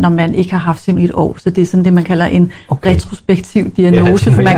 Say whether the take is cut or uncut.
cut